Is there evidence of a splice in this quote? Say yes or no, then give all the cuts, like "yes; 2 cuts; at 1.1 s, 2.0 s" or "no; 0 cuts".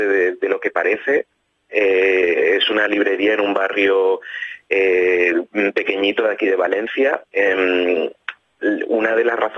yes; 1 cut; at 7.3 s